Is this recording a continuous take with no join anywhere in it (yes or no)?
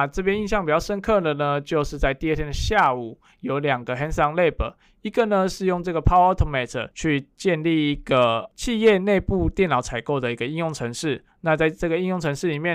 yes